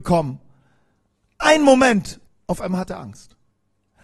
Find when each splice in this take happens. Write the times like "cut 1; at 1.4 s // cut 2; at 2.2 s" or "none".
cut 1; at 2.3 s

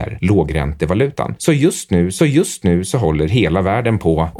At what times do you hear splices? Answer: cut 1; at 2.2 s

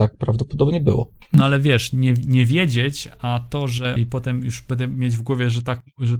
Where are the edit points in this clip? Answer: cut 1; at 4.0 s

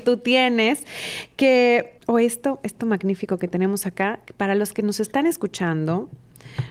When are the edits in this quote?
cut 1; at 2.0 s

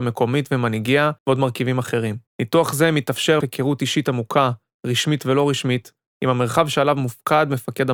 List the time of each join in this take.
cut 1; at 1.2 s // cut 2; at 2.3 s // cut 3; at 3.4 s

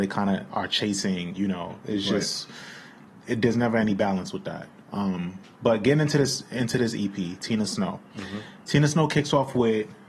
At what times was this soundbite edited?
none

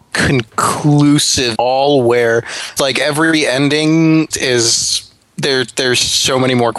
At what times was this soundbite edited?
cut 1; at 1.6 s // cut 2; at 2.8 s // cut 3; at 4.3 s

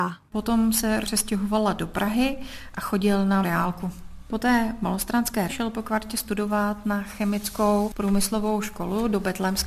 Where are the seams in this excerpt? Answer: cut 1; at 1.0 s // cut 2; at 3.4 s // cut 3; at 5.5 s

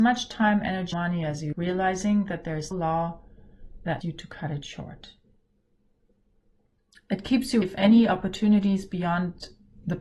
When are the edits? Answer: cut 1; at 0.9 s // cut 2; at 1.5 s // cut 3; at 2.7 s // cut 4; at 4.0 s // cut 5; at 7.6 s

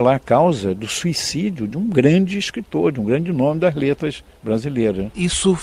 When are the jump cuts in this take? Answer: none

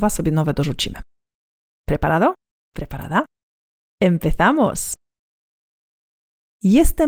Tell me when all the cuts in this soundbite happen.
none

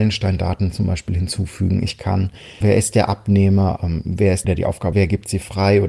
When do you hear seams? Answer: cut 1; at 2.6 s // cut 2; at 3.8 s // cut 3; at 4.4 s // cut 4; at 4.9 s

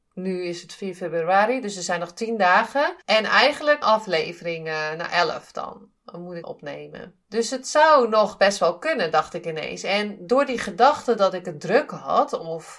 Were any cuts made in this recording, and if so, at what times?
cut 1; at 3.0 s // cut 2; at 3.8 s // cut 3; at 6.4 s // cut 4; at 7.2 s

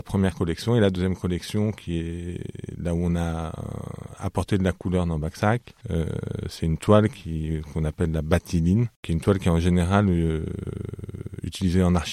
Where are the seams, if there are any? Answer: cut 1; at 5.8 s // cut 2; at 8.9 s

